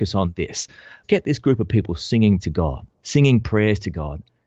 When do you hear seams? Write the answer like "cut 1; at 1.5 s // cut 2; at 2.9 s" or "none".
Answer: cut 1; at 1.0 s // cut 2; at 2.4 s // cut 3; at 2.9 s